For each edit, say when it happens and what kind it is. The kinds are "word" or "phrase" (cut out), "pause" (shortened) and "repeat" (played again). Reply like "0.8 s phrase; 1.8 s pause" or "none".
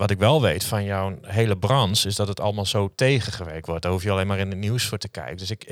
none